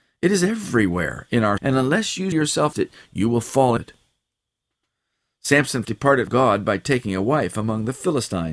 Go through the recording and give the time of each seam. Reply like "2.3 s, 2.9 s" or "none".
1.6 s, 2.3 s, 2.7 s, 3.8 s, 5.8 s, 6.3 s